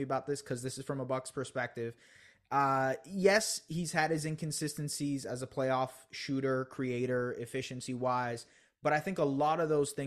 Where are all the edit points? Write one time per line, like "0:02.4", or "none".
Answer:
none